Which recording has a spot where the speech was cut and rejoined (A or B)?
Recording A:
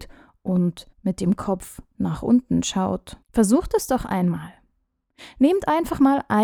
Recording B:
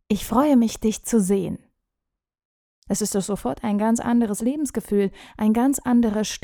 A